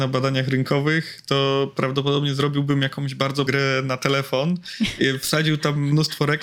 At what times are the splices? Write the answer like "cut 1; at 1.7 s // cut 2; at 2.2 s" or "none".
cut 1; at 3.5 s